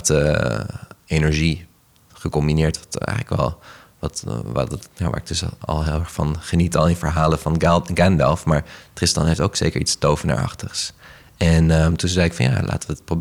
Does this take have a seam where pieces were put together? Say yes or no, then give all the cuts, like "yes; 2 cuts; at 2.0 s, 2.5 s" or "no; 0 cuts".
no; 0 cuts